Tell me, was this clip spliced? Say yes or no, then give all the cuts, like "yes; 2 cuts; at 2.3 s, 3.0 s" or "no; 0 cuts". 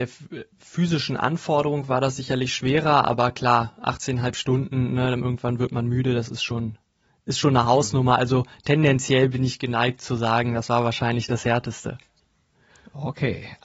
no; 0 cuts